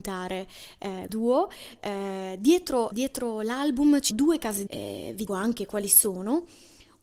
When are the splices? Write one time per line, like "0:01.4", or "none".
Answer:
0:01.1
0:02.9
0:04.1
0:04.7
0:05.3